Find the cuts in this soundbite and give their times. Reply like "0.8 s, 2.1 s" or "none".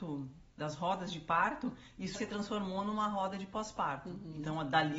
2.1 s